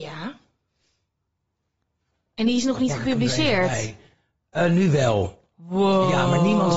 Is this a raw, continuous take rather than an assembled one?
yes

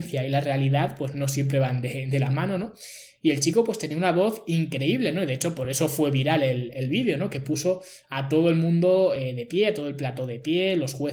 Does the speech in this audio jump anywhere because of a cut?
no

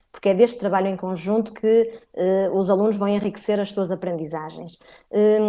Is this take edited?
no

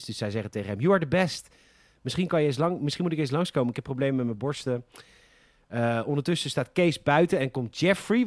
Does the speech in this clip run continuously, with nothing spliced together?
yes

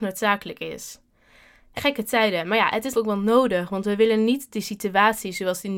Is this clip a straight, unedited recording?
no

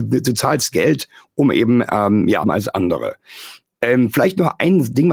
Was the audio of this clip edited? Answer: yes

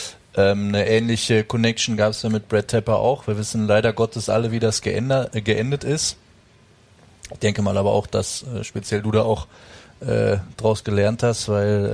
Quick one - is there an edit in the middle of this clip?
no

